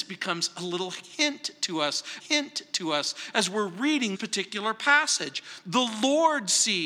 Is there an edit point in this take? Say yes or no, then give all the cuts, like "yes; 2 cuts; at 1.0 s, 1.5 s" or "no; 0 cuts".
yes; 2 cuts; at 2.2 s, 4.1 s